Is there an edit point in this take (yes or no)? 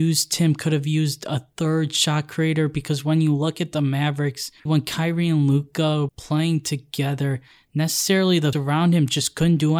yes